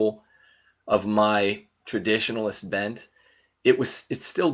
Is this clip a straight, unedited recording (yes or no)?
yes